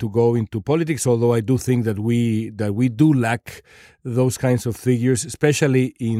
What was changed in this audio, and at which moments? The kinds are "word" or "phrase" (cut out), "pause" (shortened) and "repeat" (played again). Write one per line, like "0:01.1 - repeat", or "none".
none